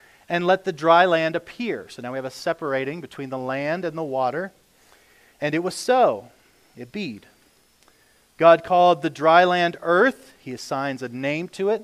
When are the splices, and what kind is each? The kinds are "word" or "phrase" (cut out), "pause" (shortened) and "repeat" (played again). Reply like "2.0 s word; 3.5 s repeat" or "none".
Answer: none

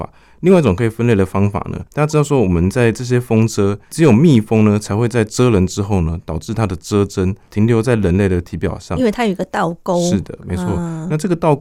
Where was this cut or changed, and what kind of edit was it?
1.9 s pause

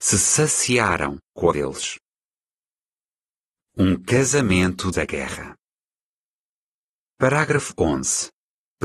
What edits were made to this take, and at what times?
1.5 s phrase; 4.9 s word

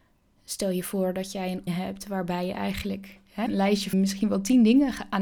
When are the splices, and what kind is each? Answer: 1.7 s word; 3.5 s word; 3.9 s word

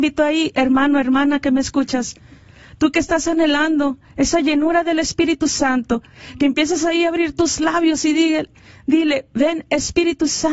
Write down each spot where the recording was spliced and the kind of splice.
none

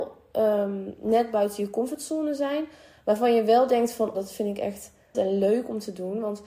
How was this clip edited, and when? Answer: 4.1 s word; 5.1 s word

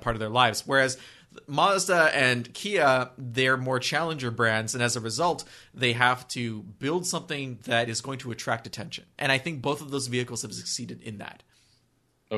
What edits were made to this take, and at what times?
none

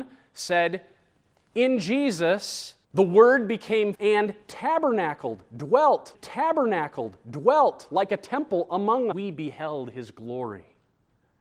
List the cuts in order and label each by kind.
2.8 s pause; 3.9 s word; 6.1 s repeat; 9.1 s phrase

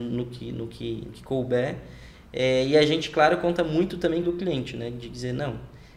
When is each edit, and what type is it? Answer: 1.1 s word; 4.2 s phrase

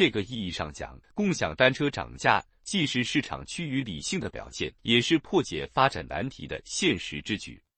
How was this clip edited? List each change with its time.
1.0 s pause; 4.8 s pause

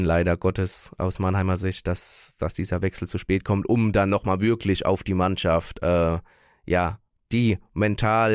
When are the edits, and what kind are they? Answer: none

